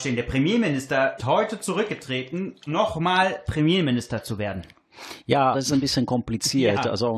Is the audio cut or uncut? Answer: cut